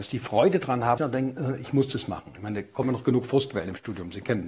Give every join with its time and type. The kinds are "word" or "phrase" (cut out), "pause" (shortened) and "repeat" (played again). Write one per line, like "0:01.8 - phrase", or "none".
0:01.0 - phrase
0:02.8 - word